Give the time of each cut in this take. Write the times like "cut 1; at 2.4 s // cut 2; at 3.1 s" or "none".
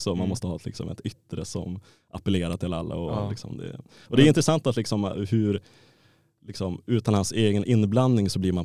none